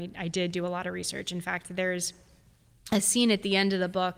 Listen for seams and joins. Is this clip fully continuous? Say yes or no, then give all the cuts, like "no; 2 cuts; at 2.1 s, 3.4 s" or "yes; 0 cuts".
yes; 0 cuts